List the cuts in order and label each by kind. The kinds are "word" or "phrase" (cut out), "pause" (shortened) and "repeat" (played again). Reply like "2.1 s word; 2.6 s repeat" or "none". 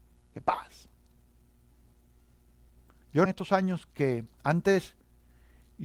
3.3 s word

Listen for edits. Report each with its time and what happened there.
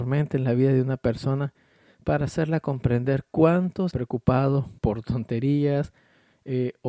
3.9 s phrase; 4.8 s pause

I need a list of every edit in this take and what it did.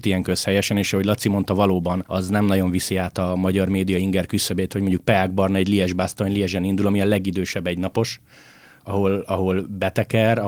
none

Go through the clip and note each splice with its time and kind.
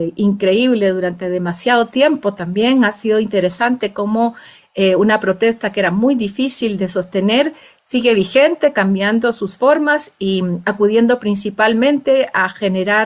none

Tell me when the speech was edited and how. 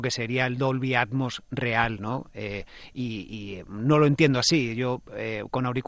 none

